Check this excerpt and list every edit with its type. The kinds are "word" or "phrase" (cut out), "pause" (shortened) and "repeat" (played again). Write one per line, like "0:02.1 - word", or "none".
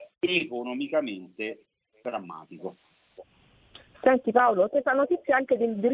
0:04.7 - word